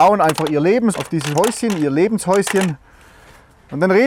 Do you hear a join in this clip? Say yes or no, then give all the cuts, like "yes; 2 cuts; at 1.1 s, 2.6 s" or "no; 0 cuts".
yes; 2 cuts; at 0.9 s, 1.3 s